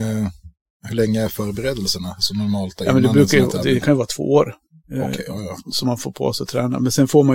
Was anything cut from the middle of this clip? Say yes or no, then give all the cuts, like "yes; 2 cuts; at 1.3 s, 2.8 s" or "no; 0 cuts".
no; 0 cuts